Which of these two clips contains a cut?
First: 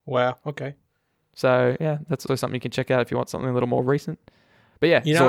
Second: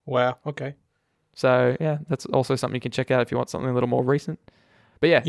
first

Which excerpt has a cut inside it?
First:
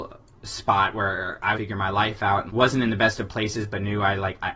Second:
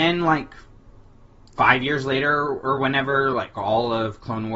first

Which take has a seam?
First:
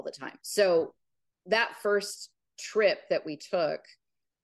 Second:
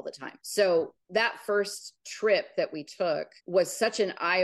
second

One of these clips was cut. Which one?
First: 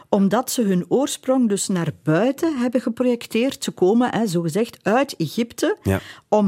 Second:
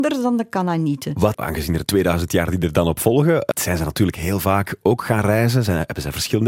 second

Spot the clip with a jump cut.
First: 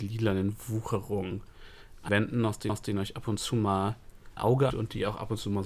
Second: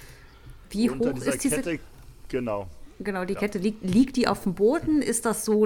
first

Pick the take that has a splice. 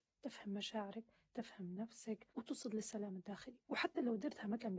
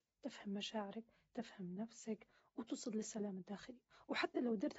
first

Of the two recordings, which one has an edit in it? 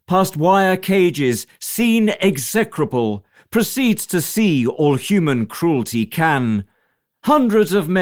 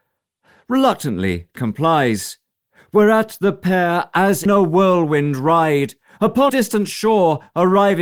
second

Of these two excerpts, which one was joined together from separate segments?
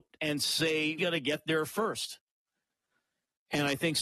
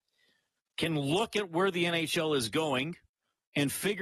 first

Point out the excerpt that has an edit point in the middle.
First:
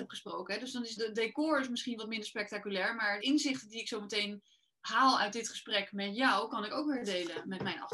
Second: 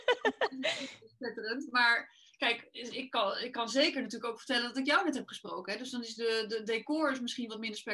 first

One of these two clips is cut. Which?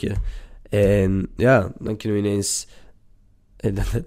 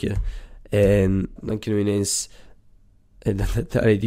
second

